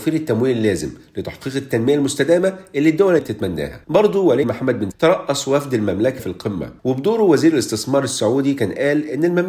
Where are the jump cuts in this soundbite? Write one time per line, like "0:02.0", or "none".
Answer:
0:03.2
0:03.8
0:04.4
0:04.9
0:06.2
0:06.8